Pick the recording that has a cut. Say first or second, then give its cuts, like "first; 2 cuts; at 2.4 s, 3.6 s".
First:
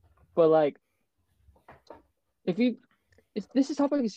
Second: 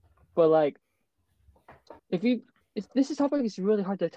second; 2 cuts; at 2.0 s, 2.6 s